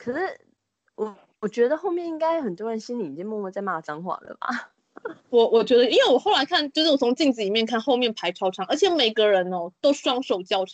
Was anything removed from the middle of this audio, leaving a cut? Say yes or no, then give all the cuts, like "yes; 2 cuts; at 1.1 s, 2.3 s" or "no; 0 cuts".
yes; 1 cut; at 5.2 s